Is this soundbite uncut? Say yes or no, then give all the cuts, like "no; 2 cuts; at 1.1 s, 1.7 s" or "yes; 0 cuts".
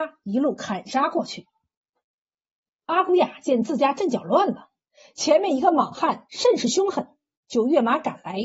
yes; 0 cuts